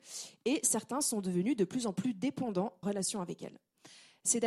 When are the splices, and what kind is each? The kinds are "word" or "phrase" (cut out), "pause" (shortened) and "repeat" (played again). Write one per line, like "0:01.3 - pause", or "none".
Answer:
0:02.8 - phrase